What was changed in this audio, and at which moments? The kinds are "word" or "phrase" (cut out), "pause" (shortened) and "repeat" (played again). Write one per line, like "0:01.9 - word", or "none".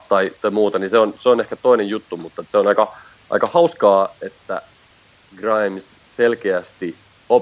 none